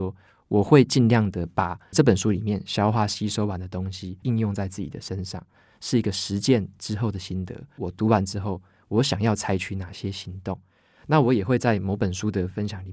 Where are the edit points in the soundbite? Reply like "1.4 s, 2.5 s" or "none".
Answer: none